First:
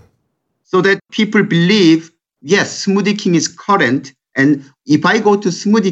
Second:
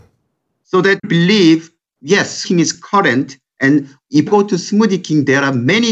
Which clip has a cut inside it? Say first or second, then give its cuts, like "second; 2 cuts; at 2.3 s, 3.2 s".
second; 3 cuts; at 1.0 s, 2.4 s, 4.3 s